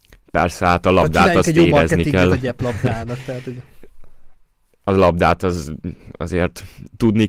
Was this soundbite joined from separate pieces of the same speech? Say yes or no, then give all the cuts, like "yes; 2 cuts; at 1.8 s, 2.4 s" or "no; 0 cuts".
no; 0 cuts